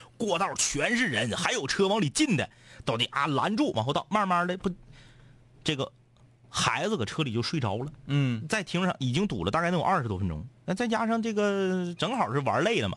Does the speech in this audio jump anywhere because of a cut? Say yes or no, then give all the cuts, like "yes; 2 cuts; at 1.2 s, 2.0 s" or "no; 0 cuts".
no; 0 cuts